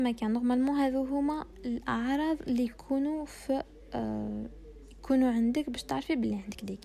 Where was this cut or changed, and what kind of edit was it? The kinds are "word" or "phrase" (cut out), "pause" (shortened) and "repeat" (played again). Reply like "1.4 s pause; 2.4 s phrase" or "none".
none